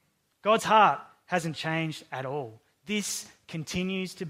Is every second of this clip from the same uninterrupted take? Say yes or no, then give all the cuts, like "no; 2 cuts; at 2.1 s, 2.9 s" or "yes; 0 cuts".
yes; 0 cuts